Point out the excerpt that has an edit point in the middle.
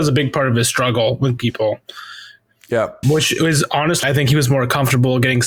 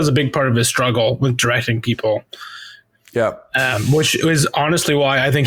first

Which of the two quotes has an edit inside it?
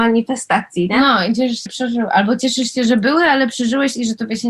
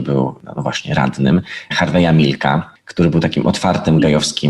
first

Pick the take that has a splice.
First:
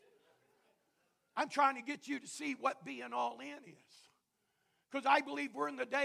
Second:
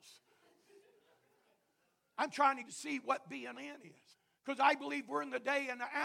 second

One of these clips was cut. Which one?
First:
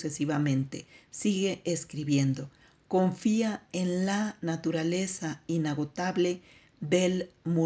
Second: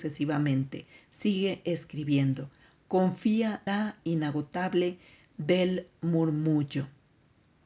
second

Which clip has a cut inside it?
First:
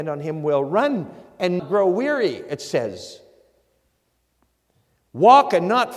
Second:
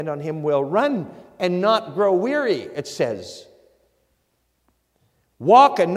first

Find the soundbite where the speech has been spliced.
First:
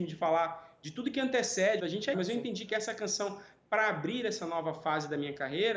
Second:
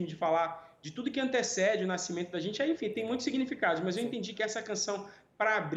first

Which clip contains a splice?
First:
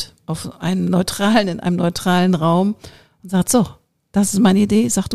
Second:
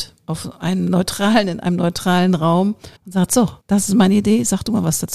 second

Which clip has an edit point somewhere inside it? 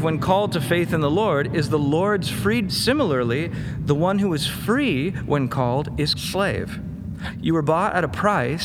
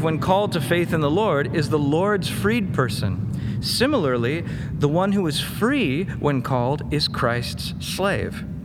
first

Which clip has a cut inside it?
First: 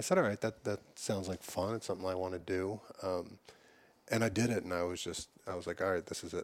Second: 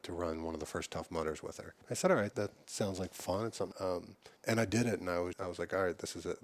second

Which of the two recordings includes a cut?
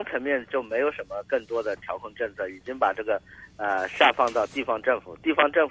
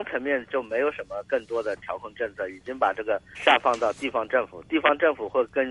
second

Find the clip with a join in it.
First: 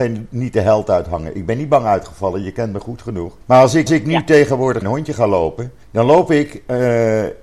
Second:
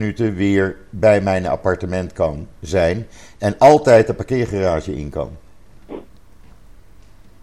first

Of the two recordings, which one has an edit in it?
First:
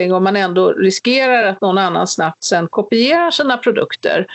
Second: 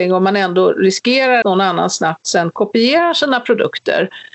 second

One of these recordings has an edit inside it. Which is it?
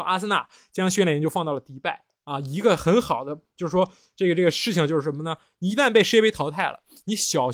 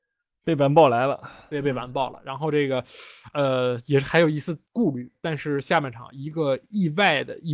second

